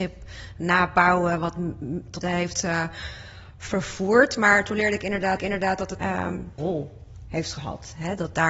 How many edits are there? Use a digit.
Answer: 4